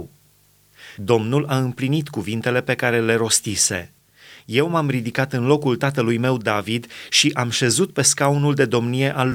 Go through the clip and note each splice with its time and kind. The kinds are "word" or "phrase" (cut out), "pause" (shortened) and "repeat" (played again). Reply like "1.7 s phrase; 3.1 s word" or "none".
none

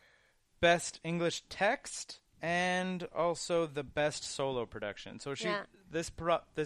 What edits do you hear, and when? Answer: 2.2 s pause

